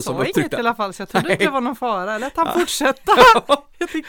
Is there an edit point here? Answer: no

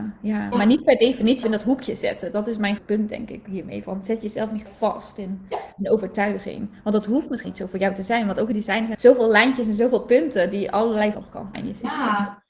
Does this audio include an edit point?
yes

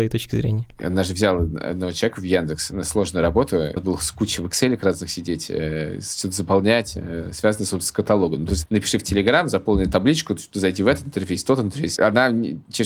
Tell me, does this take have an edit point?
yes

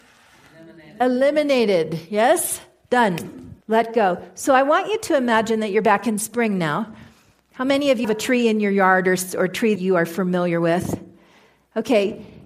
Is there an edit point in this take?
yes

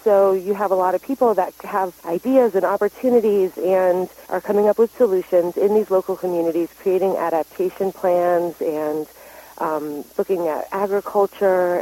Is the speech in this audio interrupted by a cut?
yes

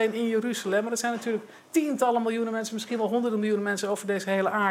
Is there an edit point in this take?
no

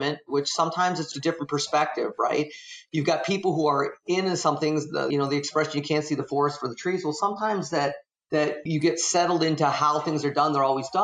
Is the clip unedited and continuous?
no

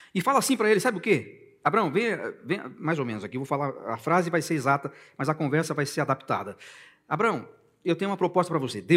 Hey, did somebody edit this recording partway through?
no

